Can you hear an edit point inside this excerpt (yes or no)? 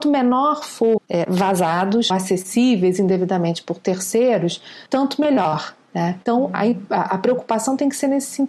yes